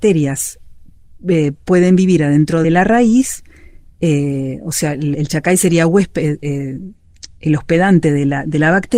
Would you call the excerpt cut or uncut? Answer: cut